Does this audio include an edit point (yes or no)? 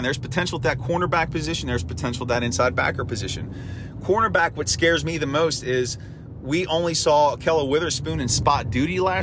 no